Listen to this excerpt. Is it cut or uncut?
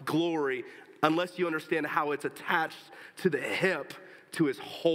uncut